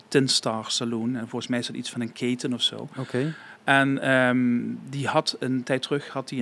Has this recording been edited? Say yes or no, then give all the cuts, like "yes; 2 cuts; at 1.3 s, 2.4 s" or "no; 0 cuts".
no; 0 cuts